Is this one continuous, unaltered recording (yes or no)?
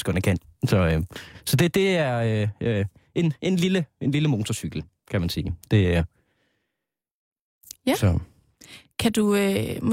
yes